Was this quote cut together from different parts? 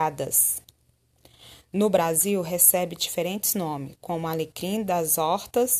no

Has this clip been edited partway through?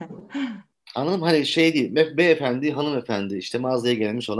no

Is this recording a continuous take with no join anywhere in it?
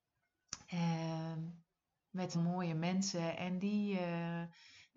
no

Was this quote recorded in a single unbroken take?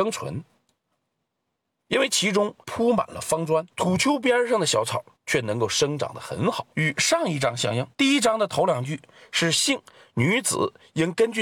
no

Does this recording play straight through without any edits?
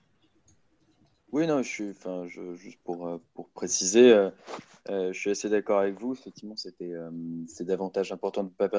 yes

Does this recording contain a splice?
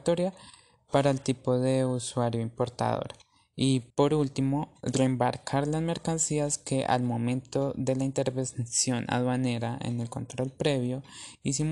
yes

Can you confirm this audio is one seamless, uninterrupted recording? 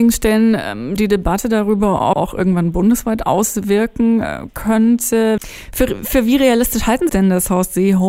no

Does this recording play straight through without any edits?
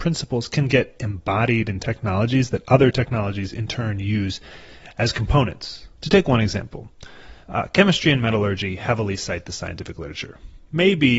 no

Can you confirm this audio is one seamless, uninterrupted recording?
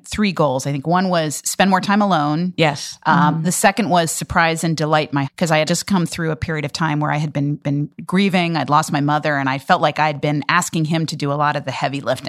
no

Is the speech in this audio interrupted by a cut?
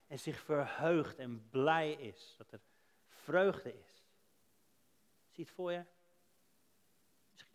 no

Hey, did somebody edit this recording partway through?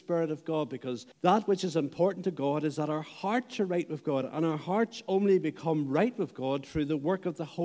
yes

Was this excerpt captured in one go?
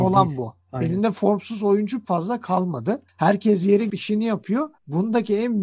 no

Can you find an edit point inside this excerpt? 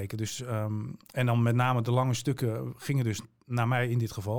no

